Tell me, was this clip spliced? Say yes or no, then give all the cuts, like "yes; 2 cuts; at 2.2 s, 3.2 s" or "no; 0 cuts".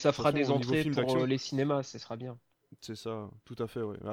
no; 0 cuts